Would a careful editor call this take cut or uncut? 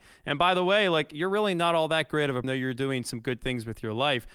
cut